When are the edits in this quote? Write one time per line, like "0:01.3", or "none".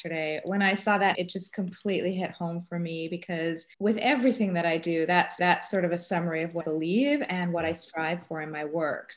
0:01.1
0:03.7
0:05.4
0:06.6

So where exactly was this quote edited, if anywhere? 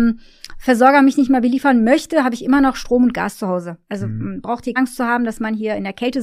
0:04.8

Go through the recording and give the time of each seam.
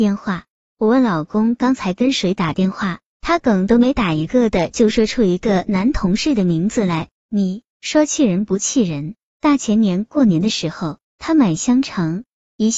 0:07.7

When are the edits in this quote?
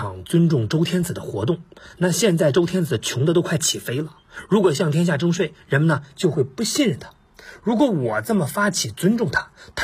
none

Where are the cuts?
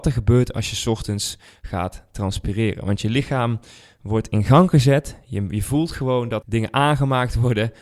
0:06.4

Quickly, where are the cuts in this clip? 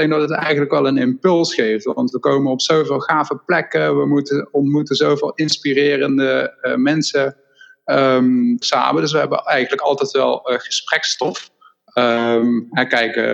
0:08.6

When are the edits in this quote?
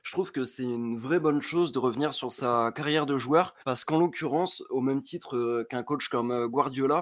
0:03.6

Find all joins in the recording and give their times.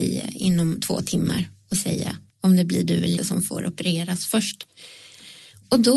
0:02.3
0:03.2

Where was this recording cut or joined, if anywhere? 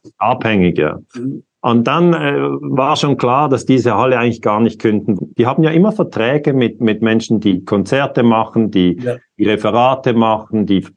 0:05.2

